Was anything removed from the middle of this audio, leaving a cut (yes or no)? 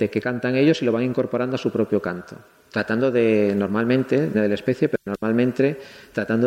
yes